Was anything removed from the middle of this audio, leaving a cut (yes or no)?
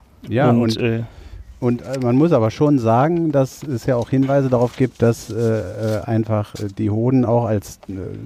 no